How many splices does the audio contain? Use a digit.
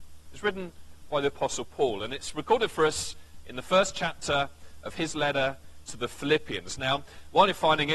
0